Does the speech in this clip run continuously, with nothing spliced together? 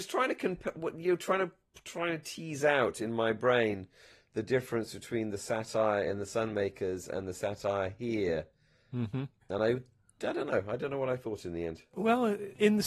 yes; 0 cuts

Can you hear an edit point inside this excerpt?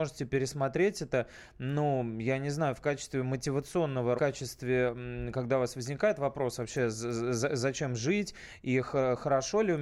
yes; 1 cut; at 4.2 s

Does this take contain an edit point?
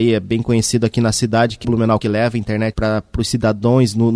yes; 3 cuts; at 1.6 s, 2.0 s, 2.7 s

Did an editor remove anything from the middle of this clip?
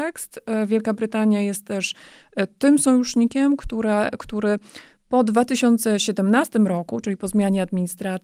no; 0 cuts

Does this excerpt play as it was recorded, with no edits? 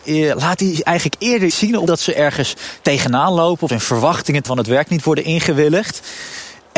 no; 4 cuts; at 1.5 s, 1.9 s, 3.7 s, 4.5 s

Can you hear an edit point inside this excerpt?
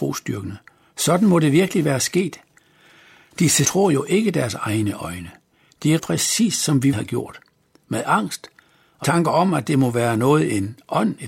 yes; 4 cuts; at 3.6 s, 6.0 s, 6.9 s, 9.0 s

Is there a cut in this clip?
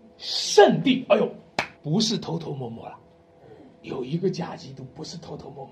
yes; 1 cut; at 1.7 s

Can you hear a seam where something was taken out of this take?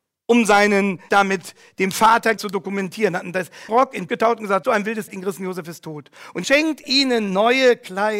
yes; 8 cuts; at 1.1 s, 2.4 s, 3.7 s, 4.1 s, 4.6 s, 5.1 s, 6.4 s, 6.8 s

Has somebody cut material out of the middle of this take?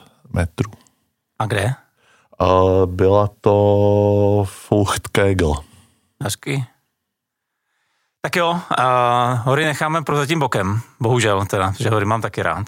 no; 0 cuts

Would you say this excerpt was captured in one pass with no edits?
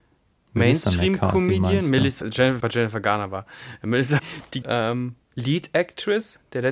no; 5 cuts; at 2.2 s, 2.6 s, 4.2 s, 4.6 s, 5.2 s

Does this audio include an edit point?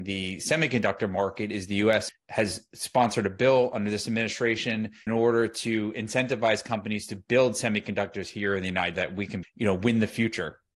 yes; 4 cuts; at 2.1 s, 5.1 s, 8.9 s, 9.4 s

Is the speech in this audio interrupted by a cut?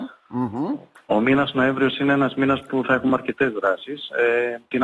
no; 0 cuts

